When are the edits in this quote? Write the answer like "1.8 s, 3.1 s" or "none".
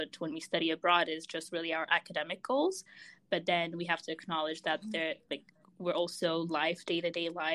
6.5 s